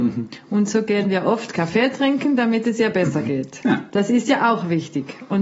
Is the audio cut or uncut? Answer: uncut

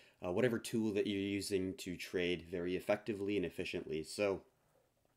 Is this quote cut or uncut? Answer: uncut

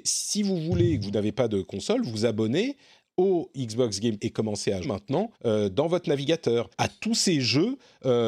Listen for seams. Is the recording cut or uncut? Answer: cut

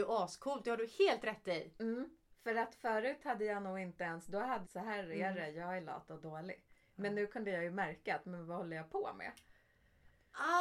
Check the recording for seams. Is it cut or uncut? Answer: cut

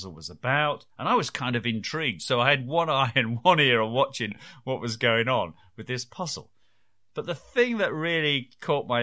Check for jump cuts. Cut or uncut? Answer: uncut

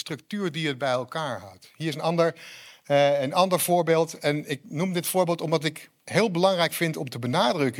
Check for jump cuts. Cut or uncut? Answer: cut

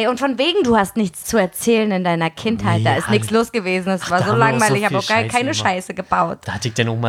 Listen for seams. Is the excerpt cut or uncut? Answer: cut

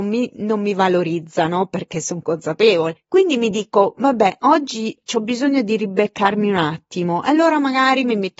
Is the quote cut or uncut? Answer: uncut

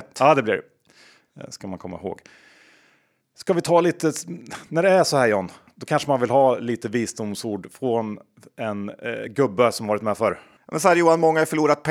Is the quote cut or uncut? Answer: uncut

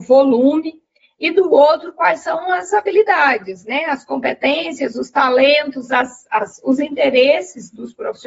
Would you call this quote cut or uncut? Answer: uncut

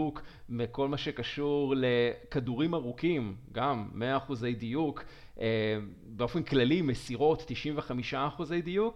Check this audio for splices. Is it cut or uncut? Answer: uncut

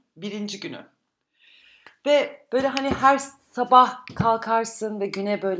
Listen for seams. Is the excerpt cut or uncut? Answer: uncut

